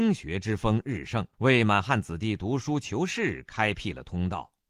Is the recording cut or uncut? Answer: cut